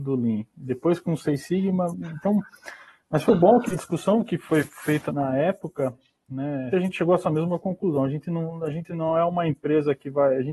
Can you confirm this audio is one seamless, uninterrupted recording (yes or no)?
no